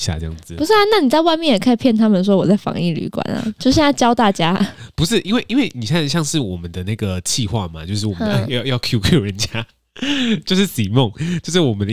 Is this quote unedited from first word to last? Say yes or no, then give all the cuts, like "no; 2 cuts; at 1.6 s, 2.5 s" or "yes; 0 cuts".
yes; 0 cuts